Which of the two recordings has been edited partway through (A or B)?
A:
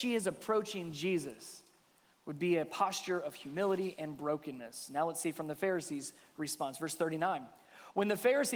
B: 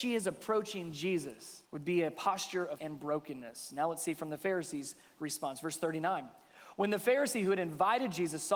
B